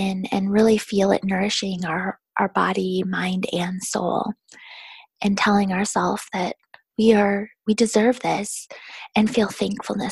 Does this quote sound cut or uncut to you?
uncut